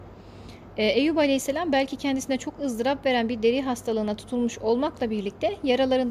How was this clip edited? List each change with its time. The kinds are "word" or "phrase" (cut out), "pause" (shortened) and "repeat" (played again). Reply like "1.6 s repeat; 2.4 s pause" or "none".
none